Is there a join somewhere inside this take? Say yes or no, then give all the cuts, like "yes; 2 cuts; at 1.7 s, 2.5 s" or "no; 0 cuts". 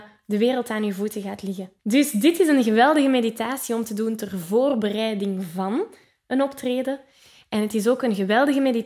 yes; 1 cut; at 1.8 s